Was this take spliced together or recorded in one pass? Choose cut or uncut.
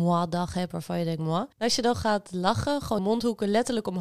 cut